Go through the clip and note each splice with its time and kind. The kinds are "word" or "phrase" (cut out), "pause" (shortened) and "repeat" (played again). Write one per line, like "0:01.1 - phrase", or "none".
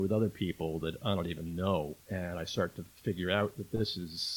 0:02.0 - pause
0:02.9 - pause